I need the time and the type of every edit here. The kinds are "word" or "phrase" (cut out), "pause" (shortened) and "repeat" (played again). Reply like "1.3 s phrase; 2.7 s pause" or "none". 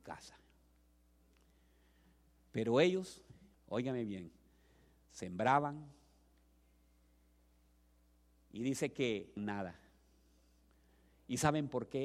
3.5 s pause; 9.4 s phrase

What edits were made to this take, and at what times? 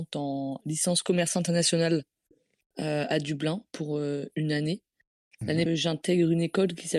3.7 s word; 5.7 s word

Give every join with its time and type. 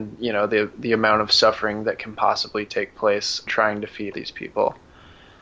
3.5 s word; 4.1 s word

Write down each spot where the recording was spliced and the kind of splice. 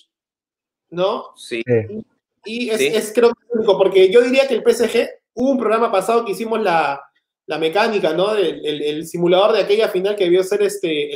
5.3 s pause

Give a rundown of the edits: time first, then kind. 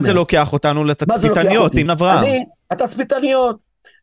1.9 s word

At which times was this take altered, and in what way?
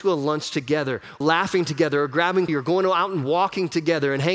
1.2 s word; 2.5 s word

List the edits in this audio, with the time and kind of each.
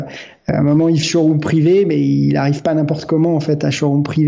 1.0 s word

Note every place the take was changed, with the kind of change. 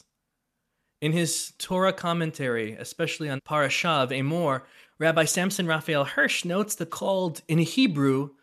3.4 s word; 4.8 s pause; 6.9 s phrase

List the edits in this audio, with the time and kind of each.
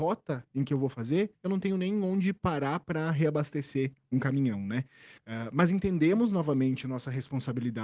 1.3 s pause; 5.2 s pause

